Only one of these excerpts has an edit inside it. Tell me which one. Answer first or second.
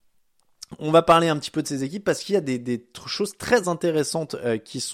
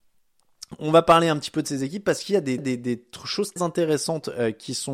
second